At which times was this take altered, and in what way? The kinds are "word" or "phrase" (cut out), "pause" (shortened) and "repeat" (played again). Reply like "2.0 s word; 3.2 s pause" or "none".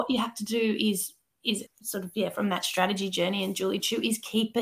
1.7 s word